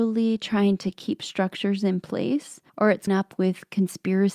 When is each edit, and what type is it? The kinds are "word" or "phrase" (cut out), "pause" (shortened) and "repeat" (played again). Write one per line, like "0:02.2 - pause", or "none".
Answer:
0:02.7 - pause
0:03.1 - word